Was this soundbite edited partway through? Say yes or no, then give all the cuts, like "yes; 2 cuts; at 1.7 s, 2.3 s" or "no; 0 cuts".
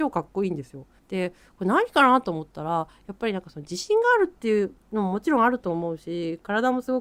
yes; 1 cut; at 1.0 s